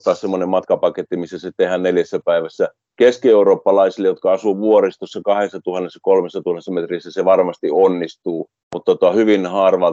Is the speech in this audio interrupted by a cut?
no; 0 cuts

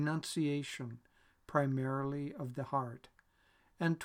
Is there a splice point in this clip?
no; 0 cuts

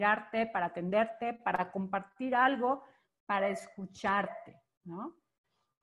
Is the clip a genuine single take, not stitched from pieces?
yes; 0 cuts

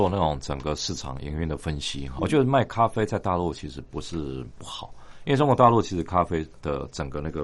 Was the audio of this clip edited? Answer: yes; 1 cut; at 2.2 s

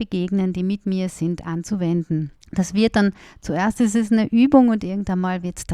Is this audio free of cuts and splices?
no; 1 cut; at 2.4 s

